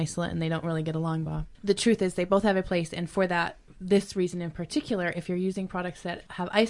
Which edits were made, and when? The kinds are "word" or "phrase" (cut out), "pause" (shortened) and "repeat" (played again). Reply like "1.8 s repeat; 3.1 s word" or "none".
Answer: 1.3 s word